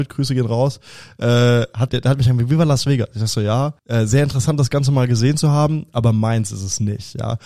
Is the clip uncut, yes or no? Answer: no